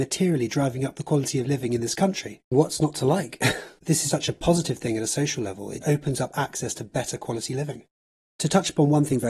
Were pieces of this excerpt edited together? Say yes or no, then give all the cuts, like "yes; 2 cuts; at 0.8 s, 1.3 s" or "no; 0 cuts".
yes; 3 cuts; at 2.5 s, 4.1 s, 5.8 s